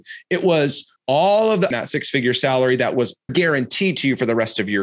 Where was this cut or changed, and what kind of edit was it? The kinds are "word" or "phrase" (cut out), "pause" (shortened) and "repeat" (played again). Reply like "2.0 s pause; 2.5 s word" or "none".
1.0 s pause; 1.7 s phrase; 3.3 s word